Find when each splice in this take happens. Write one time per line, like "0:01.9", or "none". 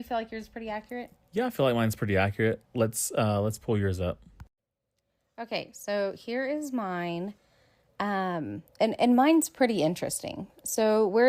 none